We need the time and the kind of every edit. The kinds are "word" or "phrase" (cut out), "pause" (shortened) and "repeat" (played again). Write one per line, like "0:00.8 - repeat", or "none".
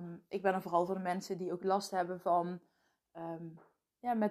none